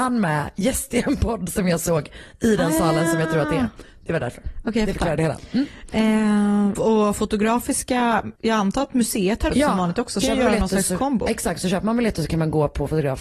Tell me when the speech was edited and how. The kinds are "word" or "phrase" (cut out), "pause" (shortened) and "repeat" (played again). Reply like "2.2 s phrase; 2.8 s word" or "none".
6.8 s word; 8.4 s pause; 9.5 s word; 10.2 s phrase